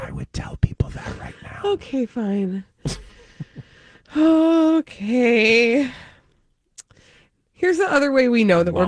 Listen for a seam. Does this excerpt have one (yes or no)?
no